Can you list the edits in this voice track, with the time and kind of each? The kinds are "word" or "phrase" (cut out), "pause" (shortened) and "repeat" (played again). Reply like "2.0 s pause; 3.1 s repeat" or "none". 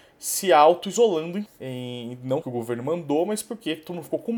1.5 s word; 2.4 s phrase